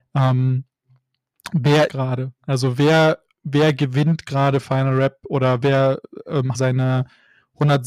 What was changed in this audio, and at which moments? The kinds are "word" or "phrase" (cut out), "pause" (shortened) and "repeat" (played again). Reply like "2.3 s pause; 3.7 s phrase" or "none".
1.9 s phrase; 2.4 s pause; 5.6 s word; 6.5 s phrase